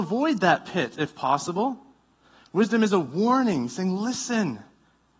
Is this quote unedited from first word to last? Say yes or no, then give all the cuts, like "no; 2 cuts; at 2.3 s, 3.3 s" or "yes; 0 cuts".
yes; 0 cuts